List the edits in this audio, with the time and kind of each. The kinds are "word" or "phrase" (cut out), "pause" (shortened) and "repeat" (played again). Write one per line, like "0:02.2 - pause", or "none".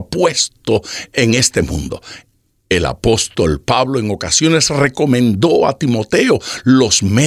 none

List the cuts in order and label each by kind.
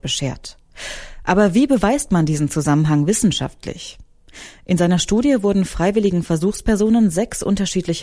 none

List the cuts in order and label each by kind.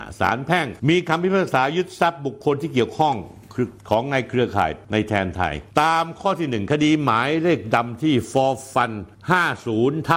0:03.8 - pause

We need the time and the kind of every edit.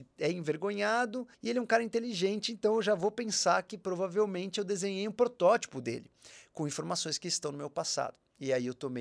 0:01.3 - pause

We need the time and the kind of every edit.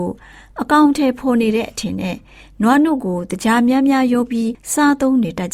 none

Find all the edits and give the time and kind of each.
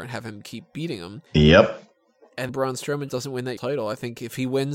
0:01.3 - pause
0:02.5 - word
0:03.1 - word
0:03.6 - word

